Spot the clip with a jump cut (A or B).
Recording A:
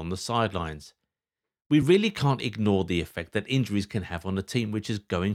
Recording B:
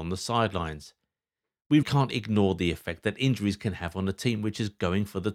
B